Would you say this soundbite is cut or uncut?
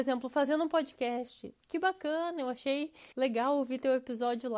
cut